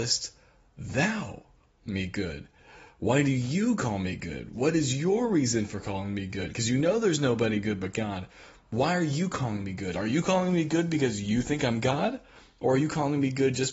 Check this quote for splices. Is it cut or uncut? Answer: uncut